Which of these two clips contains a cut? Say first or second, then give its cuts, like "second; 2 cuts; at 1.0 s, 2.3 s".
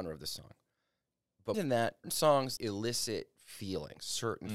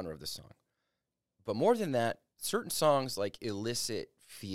first; 3 cuts; at 1.5 s, 2.0 s, 2.6 s